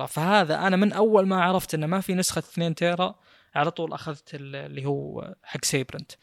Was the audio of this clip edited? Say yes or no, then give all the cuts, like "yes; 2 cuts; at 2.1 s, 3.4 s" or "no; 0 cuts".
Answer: no; 0 cuts